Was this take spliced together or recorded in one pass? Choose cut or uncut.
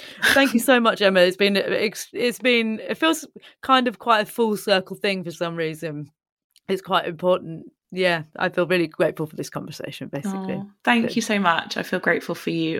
uncut